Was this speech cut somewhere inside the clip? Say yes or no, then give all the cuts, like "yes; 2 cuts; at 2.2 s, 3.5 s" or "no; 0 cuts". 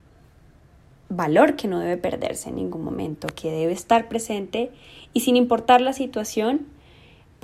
no; 0 cuts